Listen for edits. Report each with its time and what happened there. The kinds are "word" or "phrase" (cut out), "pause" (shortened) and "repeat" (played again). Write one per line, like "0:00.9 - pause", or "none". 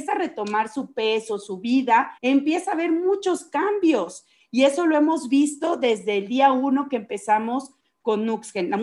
0:02.2 - pause

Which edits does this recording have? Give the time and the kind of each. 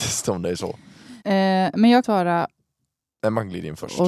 0:01.2 - pause
0:02.0 - phrase

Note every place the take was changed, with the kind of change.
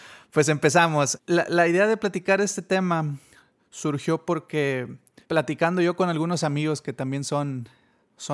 none

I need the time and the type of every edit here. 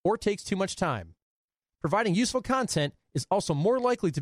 none

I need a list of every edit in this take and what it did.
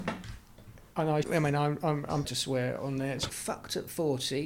0:01.2 - word
0:02.2 - phrase
0:03.3 - word

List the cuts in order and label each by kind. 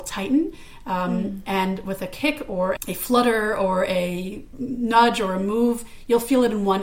0:02.8 - word

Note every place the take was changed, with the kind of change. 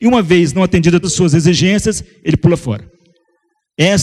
0:01.0 - word

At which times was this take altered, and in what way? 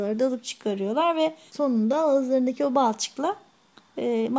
0:01.5 - word

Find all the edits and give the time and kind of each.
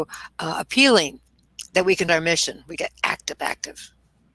0:01.7 - pause
0:02.1 - word
0:02.8 - word

